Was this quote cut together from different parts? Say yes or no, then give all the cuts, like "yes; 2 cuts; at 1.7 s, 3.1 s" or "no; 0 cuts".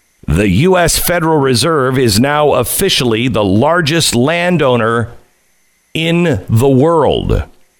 no; 0 cuts